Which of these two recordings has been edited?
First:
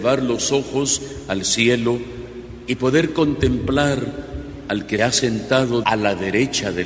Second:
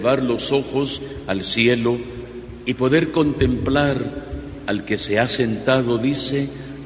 first; 2 cuts; at 5.0 s, 5.8 s

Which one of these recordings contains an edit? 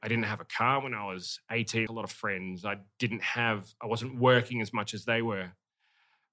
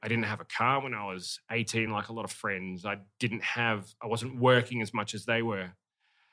first; 1 cut; at 1.9 s

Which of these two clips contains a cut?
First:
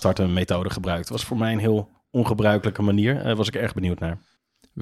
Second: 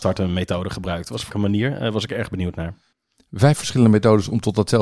second; 1 cut; at 1.3 s

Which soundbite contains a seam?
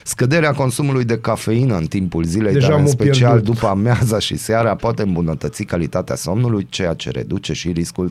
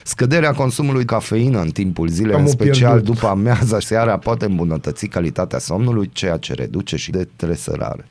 second; 4 cuts; at 1.0 s, 2.3 s, 3.8 s, 7.1 s

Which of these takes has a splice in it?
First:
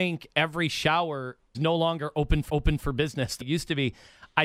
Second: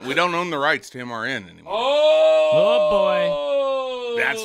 first; 3 cuts; at 1.5 s, 2.5 s, 3.4 s

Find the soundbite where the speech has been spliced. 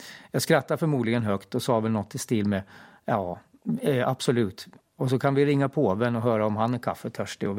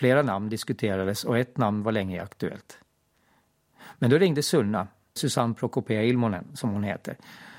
second; 1 cut; at 5.2 s

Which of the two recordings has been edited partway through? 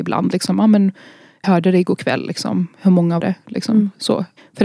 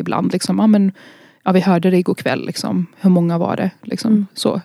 first; 2 cuts; at 1.4 s, 3.2 s

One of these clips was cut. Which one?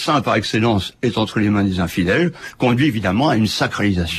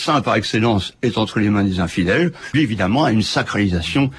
second; 1 cut; at 2.5 s

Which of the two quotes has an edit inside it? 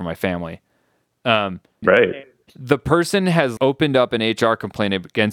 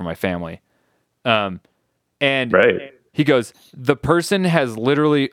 first; 3 cuts; at 1.8 s, 2.5 s, 3.6 s

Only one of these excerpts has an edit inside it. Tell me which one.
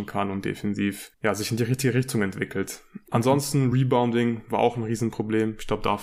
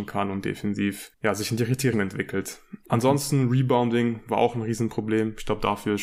second; 1 cut; at 1.9 s

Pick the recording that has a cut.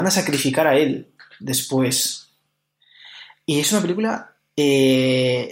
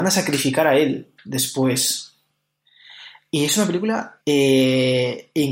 second; 2 cuts; at 1.2 s, 4.2 s

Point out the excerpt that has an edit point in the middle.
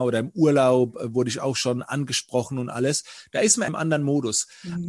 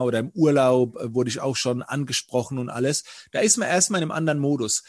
first; 1 cut; at 3.7 s

